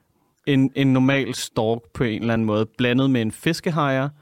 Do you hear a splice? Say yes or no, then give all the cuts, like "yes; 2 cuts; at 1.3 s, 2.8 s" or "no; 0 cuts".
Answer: no; 0 cuts